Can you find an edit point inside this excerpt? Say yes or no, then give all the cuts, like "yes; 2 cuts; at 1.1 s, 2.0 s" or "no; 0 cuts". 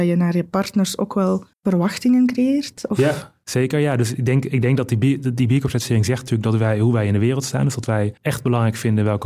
yes; 2 cuts; at 1.5 s, 8.2 s